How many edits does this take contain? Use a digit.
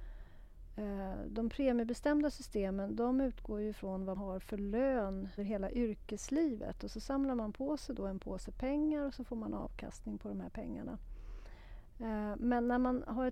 2